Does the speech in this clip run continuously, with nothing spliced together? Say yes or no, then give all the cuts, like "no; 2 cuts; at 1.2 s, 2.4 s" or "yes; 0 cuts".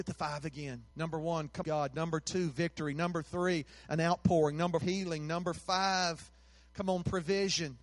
no; 3 cuts; at 0.9 s, 1.6 s, 4.8 s